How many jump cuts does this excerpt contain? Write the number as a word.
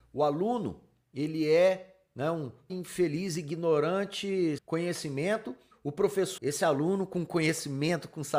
four